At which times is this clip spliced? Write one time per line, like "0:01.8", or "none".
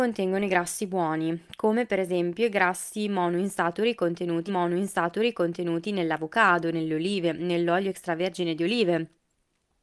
0:04.5